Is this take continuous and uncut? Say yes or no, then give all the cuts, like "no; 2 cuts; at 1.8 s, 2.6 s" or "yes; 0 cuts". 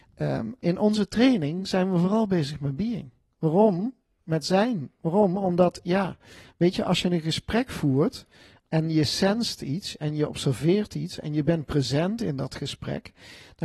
yes; 0 cuts